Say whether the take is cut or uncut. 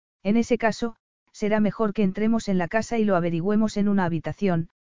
uncut